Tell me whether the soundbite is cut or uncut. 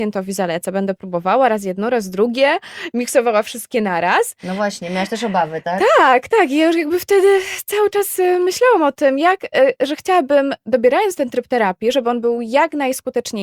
uncut